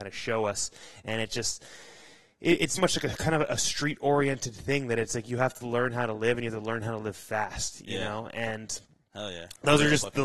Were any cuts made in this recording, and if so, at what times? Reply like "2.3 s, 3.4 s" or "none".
2.8 s